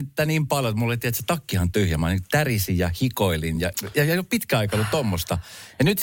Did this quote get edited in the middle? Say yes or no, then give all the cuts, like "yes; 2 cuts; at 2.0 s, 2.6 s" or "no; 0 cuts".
no; 0 cuts